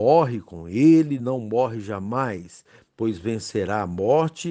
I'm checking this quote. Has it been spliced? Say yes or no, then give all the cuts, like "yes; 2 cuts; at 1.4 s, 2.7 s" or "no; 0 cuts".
no; 0 cuts